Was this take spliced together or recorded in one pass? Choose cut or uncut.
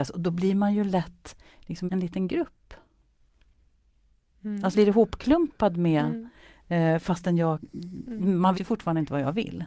cut